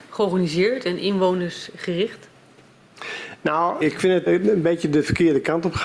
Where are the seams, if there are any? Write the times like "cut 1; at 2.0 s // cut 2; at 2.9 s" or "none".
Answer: cut 1; at 3.8 s // cut 2; at 4.3 s